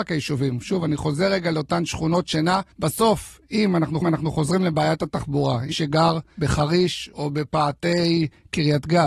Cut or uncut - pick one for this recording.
cut